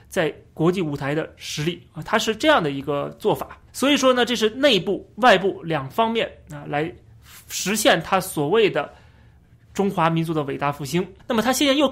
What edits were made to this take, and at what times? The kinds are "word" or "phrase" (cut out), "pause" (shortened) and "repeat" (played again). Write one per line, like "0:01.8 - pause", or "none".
0:03.7 - pause

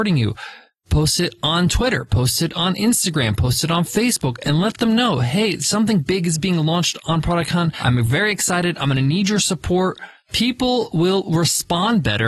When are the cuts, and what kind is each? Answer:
none

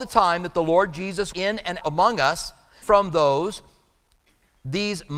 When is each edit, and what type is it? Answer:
0:01.3 - word
0:01.8 - word
0:02.8 - word

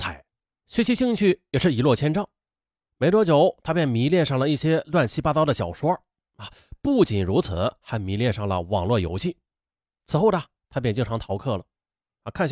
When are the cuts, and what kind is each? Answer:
none

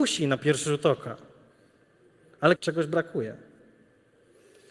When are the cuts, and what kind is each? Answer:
0:02.6 - phrase

